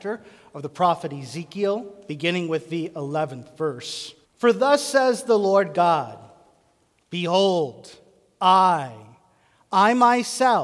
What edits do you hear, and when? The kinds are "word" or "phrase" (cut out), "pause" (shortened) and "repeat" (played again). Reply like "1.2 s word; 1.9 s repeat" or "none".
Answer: 4.2 s pause

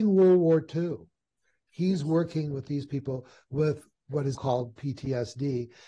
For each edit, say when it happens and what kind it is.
4.3 s word

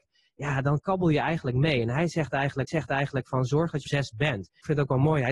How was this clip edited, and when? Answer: 2.7 s repeat; 3.8 s phrase

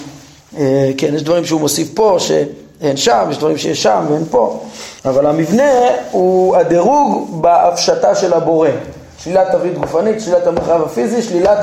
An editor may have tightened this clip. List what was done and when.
5.0 s pause

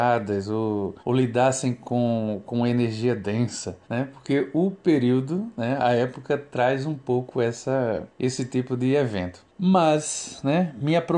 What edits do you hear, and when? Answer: 1.0 s pause; 3.8 s pause; 8.1 s pause; 9.5 s pause

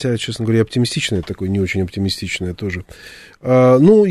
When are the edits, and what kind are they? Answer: none

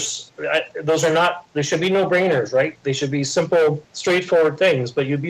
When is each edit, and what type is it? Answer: 3.8 s pause

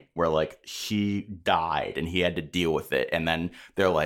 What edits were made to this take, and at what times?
none

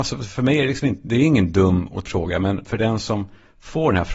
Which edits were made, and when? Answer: 2.1 s word

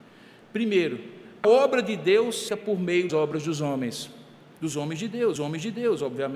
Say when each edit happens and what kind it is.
1.4 s word; 2.5 s phrase; 3.1 s word; 5.4 s repeat

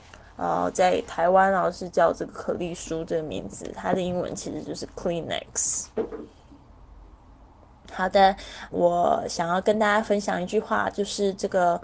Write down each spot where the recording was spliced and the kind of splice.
8.7 s word

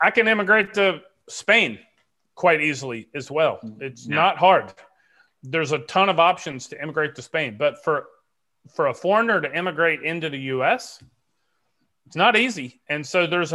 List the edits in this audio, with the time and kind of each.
none

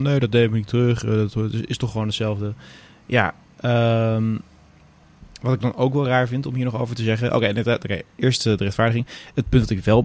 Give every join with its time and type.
none

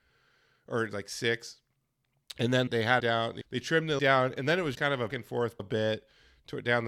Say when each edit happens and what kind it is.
2.7 s word; 3.0 s word; 3.4 s word; 4.0 s word; 4.7 s word; 5.1 s word; 5.6 s word

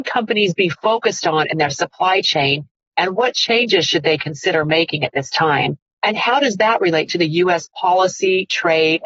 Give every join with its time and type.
none

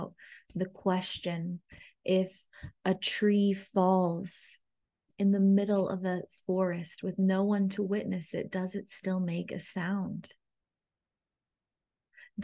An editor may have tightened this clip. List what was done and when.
none

